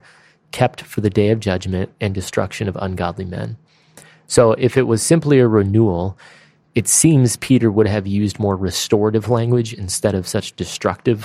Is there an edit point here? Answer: no; 0 cuts

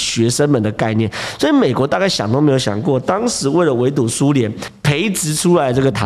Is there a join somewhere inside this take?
no; 0 cuts

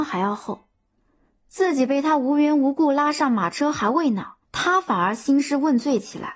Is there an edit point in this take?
yes; 1 cut; at 4.4 s

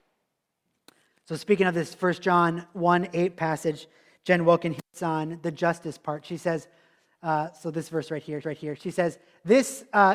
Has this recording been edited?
yes; 1 cut; at 8.4 s

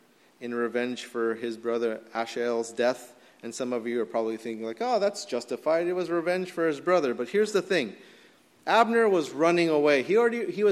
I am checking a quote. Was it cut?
no; 0 cuts

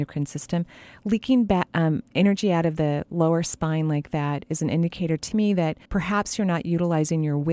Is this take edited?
yes; 1 cut; at 5.9 s

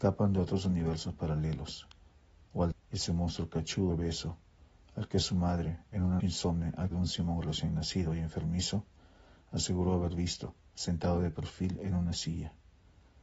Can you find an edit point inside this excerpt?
yes; 4 cuts; at 2.7 s, 3.9 s, 6.2 s, 6.9 s

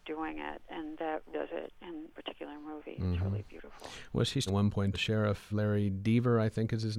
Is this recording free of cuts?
no; 5 cuts; at 1.3 s, 2.1 s, 4.5 s, 4.9 s, 5.5 s

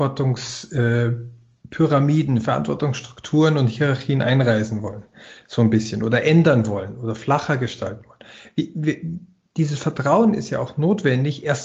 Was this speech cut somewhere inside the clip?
no; 0 cuts

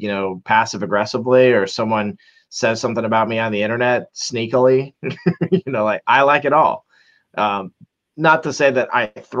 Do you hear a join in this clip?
no; 0 cuts

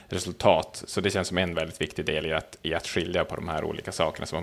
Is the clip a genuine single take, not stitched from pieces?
yes; 0 cuts

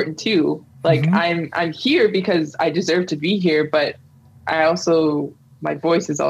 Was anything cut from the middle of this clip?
no; 0 cuts

